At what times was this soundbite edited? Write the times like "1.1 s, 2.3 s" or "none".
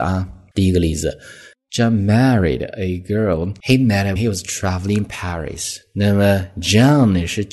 4.2 s